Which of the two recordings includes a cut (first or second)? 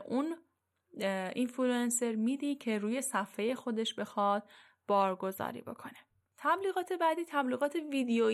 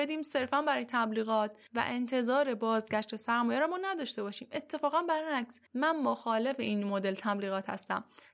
second